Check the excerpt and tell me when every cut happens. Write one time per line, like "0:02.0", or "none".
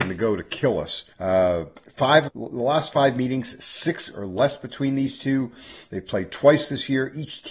0:01.1
0:02.3
0:04.1